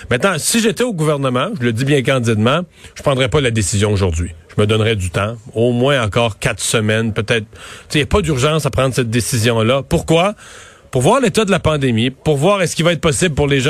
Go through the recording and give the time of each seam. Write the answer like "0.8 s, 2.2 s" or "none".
none